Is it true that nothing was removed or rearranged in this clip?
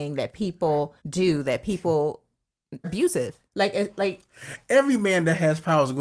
no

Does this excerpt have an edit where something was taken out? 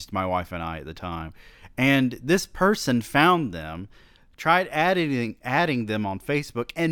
no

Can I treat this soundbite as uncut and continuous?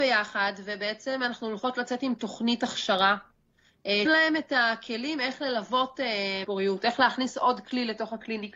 no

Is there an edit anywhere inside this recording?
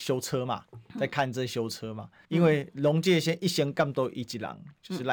yes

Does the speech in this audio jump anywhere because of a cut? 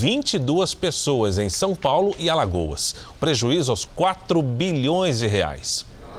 yes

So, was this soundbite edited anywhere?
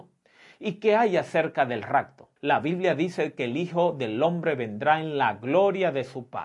yes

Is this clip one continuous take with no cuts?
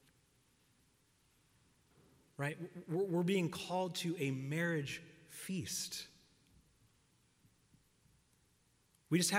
yes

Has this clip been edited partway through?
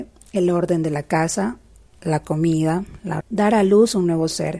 yes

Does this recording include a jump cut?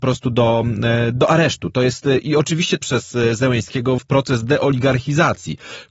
yes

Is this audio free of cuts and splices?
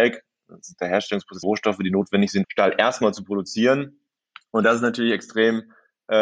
no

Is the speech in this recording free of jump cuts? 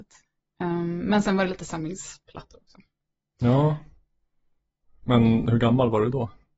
yes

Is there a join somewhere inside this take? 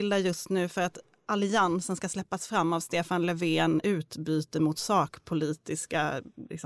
yes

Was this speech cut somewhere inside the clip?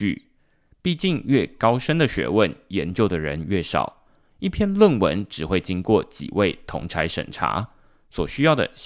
no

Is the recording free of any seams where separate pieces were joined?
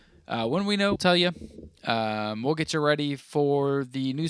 no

